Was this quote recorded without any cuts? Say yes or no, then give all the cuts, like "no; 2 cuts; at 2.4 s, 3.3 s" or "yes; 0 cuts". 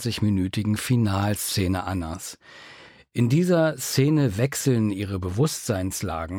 yes; 0 cuts